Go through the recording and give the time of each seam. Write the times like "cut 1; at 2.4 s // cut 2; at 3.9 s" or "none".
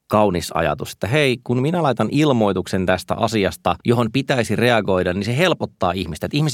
cut 1; at 3.8 s